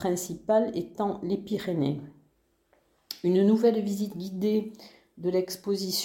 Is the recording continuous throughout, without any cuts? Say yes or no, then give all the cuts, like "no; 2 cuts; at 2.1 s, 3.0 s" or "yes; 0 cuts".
yes; 0 cuts